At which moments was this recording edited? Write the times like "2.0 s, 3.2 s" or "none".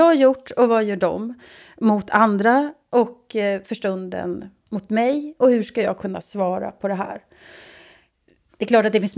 none

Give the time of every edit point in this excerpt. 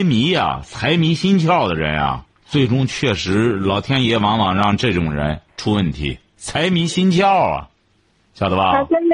2.3 s, 5.5 s

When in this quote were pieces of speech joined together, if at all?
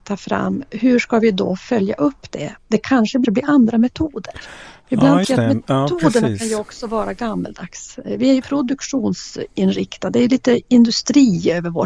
2.6 s, 3.2 s, 5.2 s, 8.4 s

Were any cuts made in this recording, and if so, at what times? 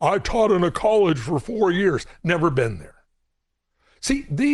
none

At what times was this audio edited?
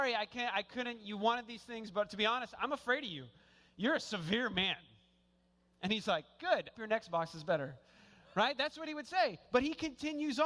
6.7 s

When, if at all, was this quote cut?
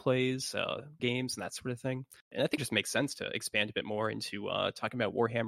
1.0 s, 2.6 s

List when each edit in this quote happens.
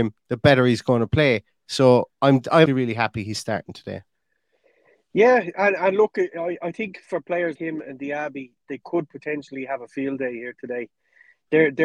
2.1 s, 2.7 s, 7.6 s

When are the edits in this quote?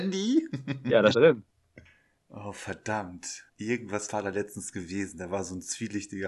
1.1 s, 3.5 s

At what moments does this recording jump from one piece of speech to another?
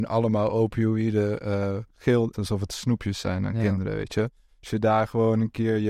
2.3 s

